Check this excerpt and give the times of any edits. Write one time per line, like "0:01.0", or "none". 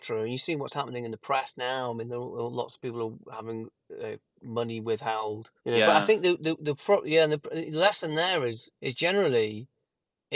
0:05.6
0:08.8

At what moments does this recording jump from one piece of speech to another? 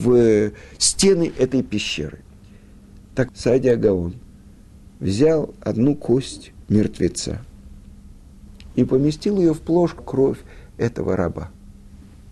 0:03.3
0:06.6
0:10.0

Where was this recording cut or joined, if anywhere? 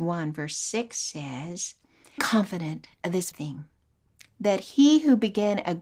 0:02.2
0:03.3

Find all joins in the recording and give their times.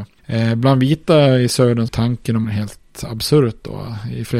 0:01.9
0:02.4

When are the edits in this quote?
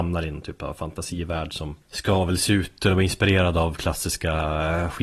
0:01.8

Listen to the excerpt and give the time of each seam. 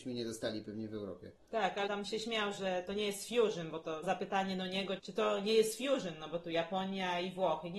0:01.9
0:04.0
0:05.0

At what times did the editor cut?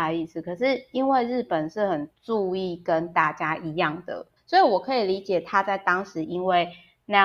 0:02.1
0:04.4

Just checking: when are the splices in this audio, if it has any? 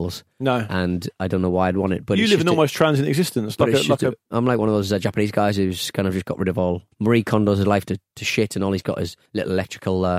0:06.9
0:08.1
0:09.3

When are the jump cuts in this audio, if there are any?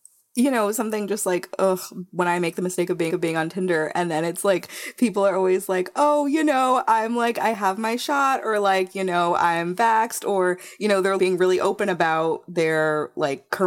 0:03.1
0:11.2

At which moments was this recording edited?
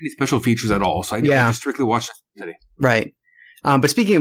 none

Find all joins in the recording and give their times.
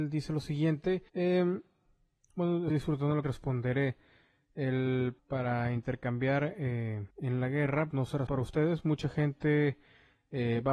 0:01.1
0:02.7
0:03.2
0:05.2
0:07.1
0:07.9
0:08.3

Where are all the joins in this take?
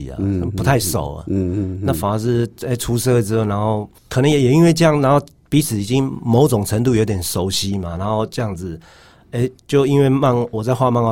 0:04.0
0:09.6

